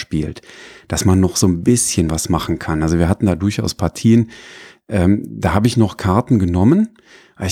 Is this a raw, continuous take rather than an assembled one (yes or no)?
yes